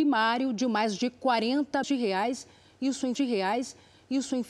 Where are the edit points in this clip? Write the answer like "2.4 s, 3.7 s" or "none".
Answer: 1.8 s, 3.2 s